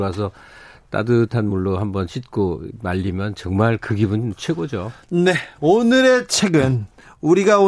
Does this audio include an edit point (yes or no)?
no